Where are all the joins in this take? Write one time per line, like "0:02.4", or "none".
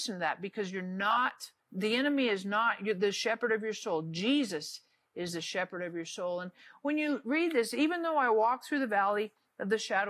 0:01.6